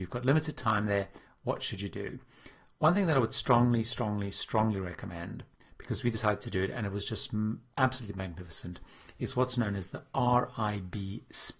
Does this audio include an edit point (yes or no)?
no